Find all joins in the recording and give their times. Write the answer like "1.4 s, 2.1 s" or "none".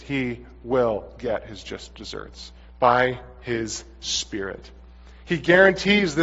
2.6 s